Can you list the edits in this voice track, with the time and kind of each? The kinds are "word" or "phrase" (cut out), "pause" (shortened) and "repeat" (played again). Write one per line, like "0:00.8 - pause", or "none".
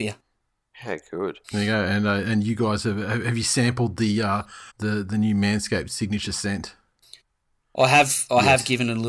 0:01.4 - pause
0:04.7 - pause